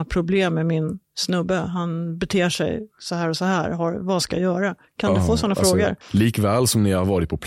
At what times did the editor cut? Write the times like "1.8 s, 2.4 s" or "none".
1.0 s, 6.0 s

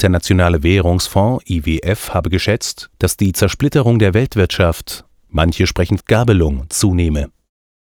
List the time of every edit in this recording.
6.0 s

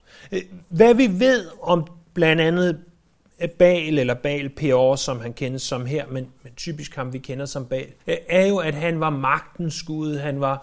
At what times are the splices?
8.0 s

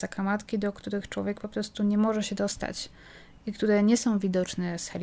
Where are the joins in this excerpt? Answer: none

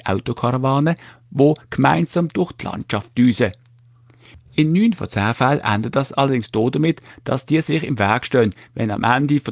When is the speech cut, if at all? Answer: none

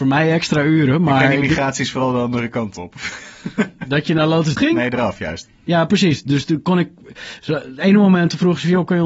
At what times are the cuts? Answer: 4.6 s

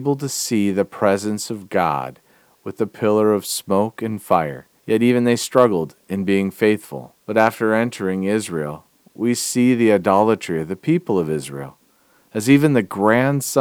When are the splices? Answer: 4.8 s, 7.2 s

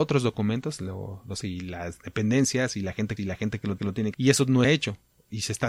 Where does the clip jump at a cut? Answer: 1.4 s, 3.2 s, 3.8 s, 4.1 s, 4.6 s

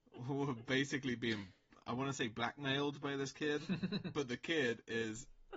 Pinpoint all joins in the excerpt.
none

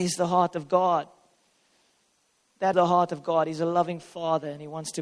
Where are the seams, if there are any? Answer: 2.7 s

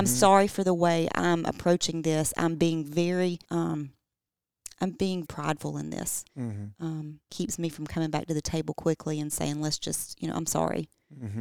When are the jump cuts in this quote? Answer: 3.4 s, 5.2 s, 6.3 s, 7.3 s

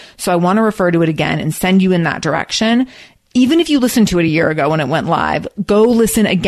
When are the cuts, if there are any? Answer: none

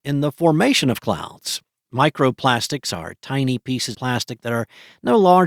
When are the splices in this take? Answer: 3.9 s

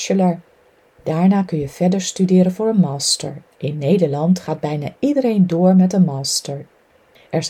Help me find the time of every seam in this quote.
3.5 s

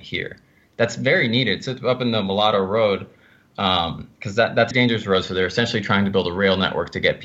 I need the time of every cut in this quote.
4.1 s, 4.7 s

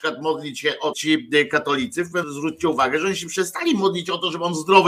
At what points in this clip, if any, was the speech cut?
0.9 s, 2.2 s

